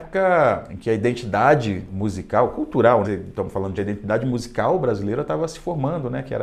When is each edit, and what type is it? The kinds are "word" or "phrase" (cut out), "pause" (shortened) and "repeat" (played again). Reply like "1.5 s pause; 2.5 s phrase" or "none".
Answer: 3.0 s word; 3.8 s phrase